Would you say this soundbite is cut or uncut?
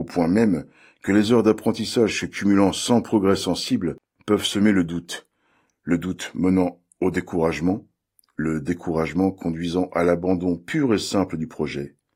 uncut